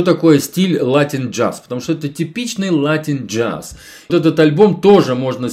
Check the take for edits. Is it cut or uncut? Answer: cut